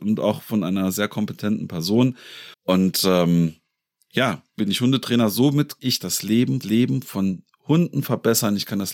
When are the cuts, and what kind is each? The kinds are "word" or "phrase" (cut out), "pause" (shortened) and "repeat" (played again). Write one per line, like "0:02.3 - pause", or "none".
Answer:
0:02.5 - pause
0:04.6 - word
0:05.8 - word
0:06.6 - repeat

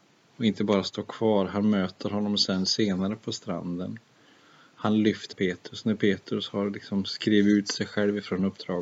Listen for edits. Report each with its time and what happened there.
0:05.3 - word

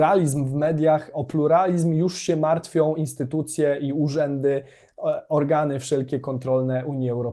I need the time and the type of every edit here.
none

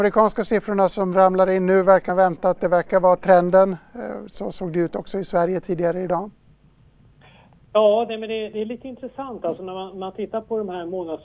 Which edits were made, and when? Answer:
0:02.1 - phrase

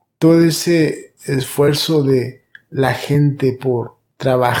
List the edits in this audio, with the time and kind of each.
none

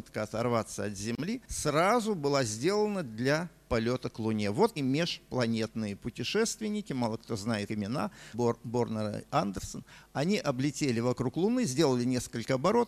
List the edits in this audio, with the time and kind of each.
0:01.4 - pause
0:04.8 - word
0:07.7 - word
0:08.3 - word

